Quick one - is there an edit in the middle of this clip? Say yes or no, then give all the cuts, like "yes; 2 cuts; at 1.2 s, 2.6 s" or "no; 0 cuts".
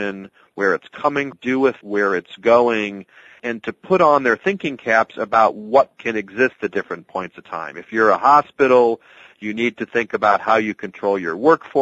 yes; 3 cuts; at 1.3 s, 1.8 s, 6.0 s